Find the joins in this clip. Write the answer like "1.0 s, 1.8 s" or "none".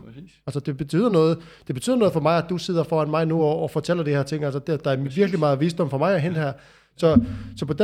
none